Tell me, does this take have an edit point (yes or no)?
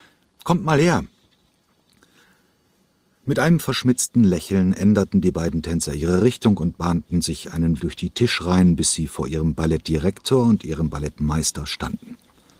yes